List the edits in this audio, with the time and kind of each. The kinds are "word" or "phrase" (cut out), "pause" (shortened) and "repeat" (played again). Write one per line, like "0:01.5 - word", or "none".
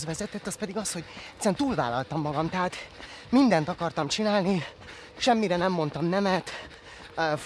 none